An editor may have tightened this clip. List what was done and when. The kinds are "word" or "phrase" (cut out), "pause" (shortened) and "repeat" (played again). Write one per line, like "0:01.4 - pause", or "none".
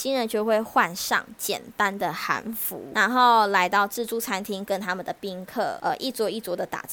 none

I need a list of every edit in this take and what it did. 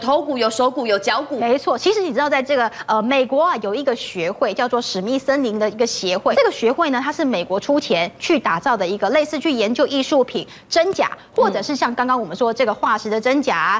0:01.4 - word
0:06.3 - word

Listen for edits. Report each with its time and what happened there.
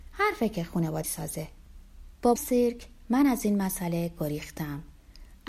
0:01.0 - phrase
0:02.4 - phrase

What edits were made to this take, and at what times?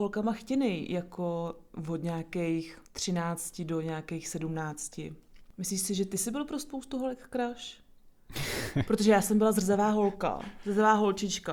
0:02.9 - pause

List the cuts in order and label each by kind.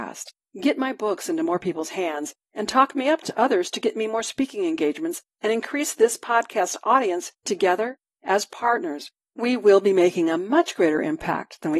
0:07.5 - word

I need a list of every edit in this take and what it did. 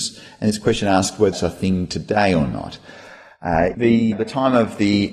0:01.3 - word
0:03.7 - word
0:04.1 - word

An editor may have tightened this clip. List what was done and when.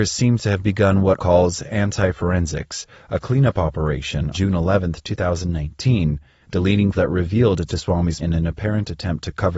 0:01.2 - word
0:04.3 - word
0:06.9 - word
0:07.7 - word
0:08.2 - word

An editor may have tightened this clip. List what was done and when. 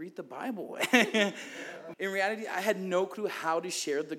0:01.9 - word

